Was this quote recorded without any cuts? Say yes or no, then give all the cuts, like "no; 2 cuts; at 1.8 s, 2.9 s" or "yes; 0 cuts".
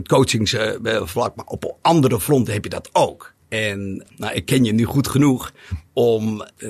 yes; 0 cuts